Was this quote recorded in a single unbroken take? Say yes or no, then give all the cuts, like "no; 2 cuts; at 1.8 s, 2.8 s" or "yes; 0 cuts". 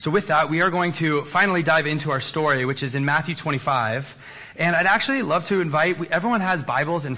yes; 0 cuts